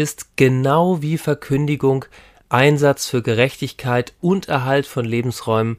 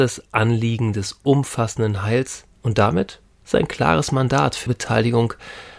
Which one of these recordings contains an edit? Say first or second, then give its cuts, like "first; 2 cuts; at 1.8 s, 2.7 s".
second; 2 cuts; at 2.5 s, 4.7 s